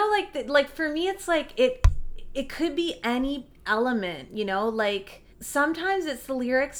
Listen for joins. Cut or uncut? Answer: cut